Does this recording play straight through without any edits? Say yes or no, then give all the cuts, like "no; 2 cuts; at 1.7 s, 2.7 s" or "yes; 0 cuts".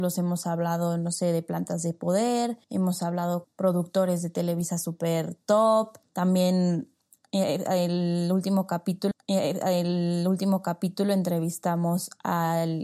no; 4 cuts; at 2.6 s, 3.4 s, 6.0 s, 9.1 s